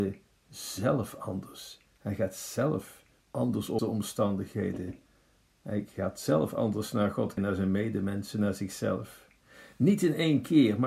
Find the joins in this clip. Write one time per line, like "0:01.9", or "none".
0:03.2
0:03.8
0:07.4